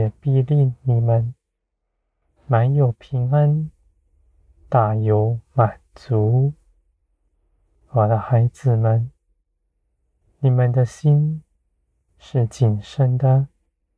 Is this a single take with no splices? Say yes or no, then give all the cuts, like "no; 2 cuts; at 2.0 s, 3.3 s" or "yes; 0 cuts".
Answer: yes; 0 cuts